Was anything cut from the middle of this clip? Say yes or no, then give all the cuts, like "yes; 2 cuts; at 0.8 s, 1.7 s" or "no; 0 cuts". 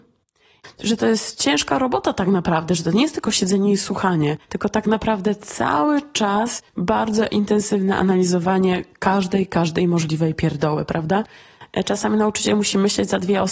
yes; 2 cuts; at 4.4 s, 6.7 s